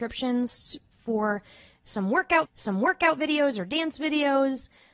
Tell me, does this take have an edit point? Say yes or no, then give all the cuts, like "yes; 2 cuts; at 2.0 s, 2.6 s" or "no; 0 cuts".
yes; 1 cut; at 2.4 s